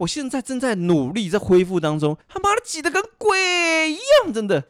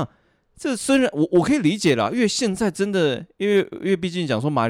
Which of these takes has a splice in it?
first; 1 cut; at 2.2 s

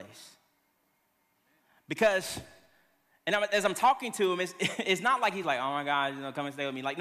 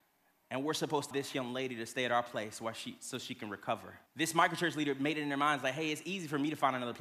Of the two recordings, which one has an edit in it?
second; 2 cuts; at 1.1 s, 4.1 s

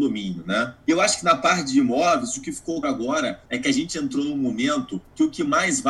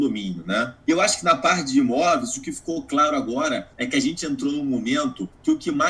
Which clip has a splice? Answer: first; 1 cut; at 2.8 s

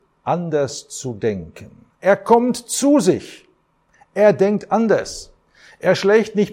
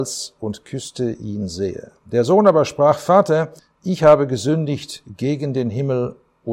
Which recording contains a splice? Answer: second; 1 cut; at 3.6 s

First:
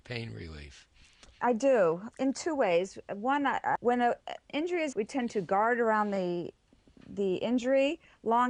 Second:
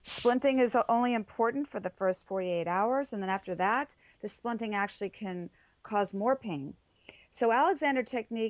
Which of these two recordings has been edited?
first; 4 cuts; at 2.1 s, 3.8 s, 4.5 s, 4.9 s

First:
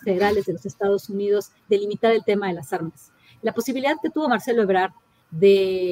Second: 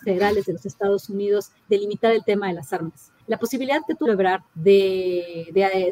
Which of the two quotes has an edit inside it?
second; 3 cuts; at 3.2 s, 4.1 s, 4.5 s

